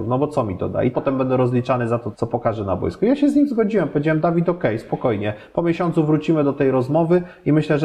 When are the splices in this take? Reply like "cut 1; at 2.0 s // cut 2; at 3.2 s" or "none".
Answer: cut 1; at 0.9 s // cut 2; at 2.1 s